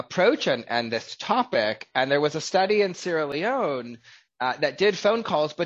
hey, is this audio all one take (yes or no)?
yes